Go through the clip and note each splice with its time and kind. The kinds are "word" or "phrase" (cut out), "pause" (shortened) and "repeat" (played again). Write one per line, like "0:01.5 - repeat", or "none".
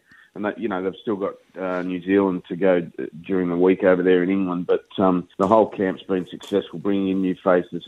0:05.3 - pause

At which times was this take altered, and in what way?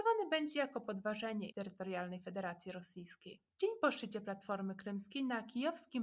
0:01.5 - word
0:03.5 - pause

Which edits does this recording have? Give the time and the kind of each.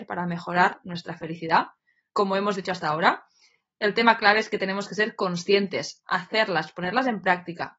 none

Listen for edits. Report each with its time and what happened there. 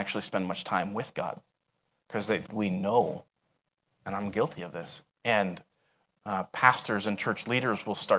0:02.5 - word
0:05.1 - pause

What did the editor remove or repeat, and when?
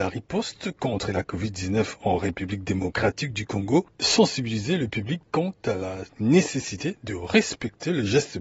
none

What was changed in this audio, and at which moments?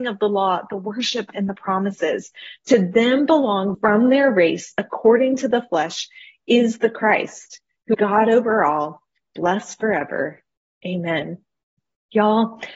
0:03.7 - phrase
0:07.9 - word

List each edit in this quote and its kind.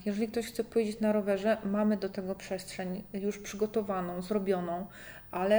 none

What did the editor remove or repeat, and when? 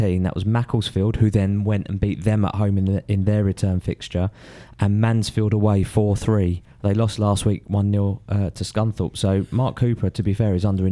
0:06.7 - pause

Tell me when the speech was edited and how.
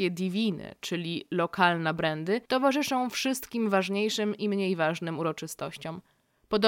0:02.5 - pause

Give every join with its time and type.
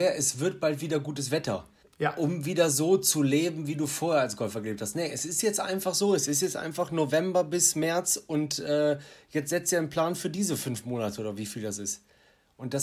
0:01.8 - pause

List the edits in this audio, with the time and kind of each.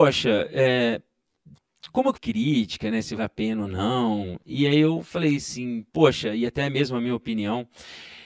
0:02.1 - phrase
0:03.2 - word
0:05.9 - pause

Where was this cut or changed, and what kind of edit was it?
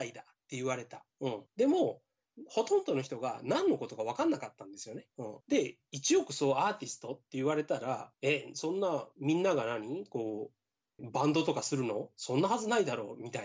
0:01.1 - pause
0:01.5 - pause
0:05.1 - pause
0:05.4 - pause
0:08.1 - pause
0:11.0 - word

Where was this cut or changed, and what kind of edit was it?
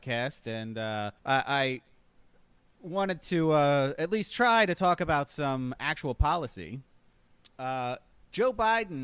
0:01.2 - pause

